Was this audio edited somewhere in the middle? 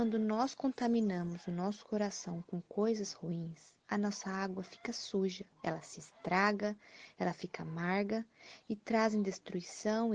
yes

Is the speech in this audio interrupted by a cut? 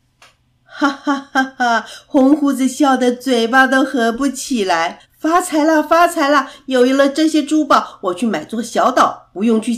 yes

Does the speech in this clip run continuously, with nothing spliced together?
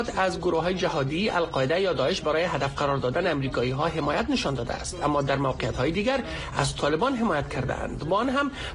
yes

